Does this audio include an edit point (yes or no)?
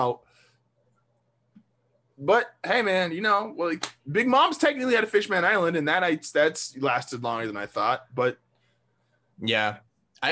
no